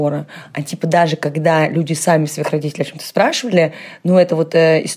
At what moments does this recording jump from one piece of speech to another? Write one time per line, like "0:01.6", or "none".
none

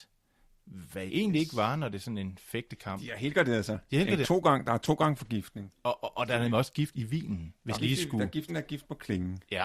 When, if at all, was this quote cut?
0:01.1
0:04.2
0:07.7
0:08.5

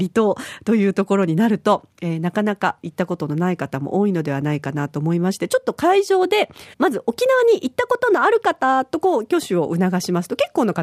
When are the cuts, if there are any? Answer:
0:06.7

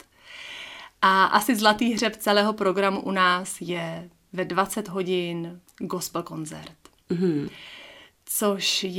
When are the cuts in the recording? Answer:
0:05.7

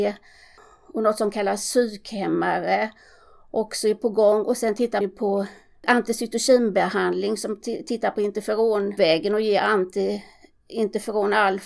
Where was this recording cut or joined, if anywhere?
0:05.0

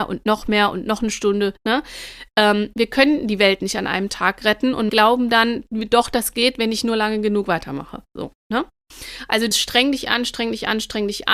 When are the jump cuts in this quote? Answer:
0:04.9
0:09.5

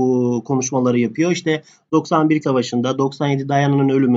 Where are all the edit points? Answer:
0:02.4

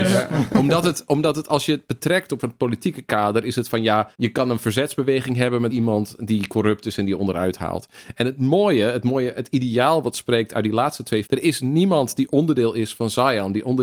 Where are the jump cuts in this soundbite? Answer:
0:02.4
0:04.1
0:05.7
0:11.3

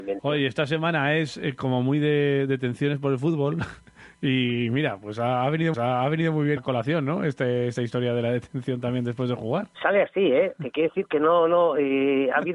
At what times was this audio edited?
0:05.7
0:06.6
0:09.7

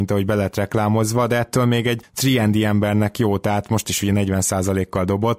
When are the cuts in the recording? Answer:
none

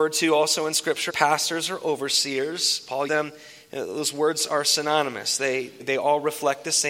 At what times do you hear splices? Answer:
0:01.1
0:03.1
0:05.8

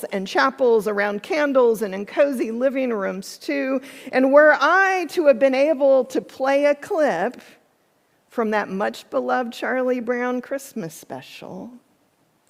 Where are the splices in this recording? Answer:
none

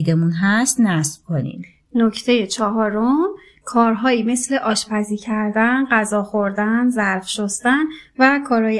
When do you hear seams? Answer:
none

